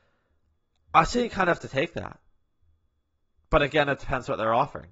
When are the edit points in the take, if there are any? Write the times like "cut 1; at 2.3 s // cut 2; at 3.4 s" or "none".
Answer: none